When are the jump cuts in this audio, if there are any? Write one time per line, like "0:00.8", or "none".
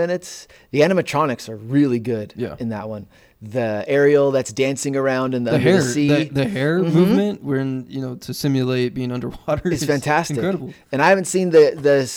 none